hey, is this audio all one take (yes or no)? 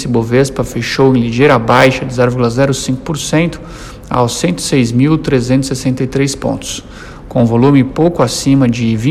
yes